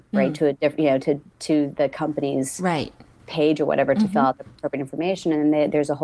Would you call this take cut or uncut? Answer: uncut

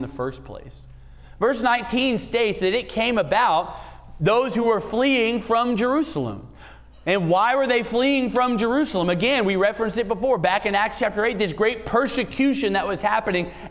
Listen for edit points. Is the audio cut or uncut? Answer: uncut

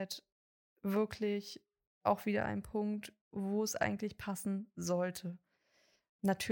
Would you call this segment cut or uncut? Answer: uncut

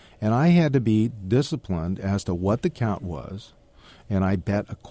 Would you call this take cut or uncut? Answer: uncut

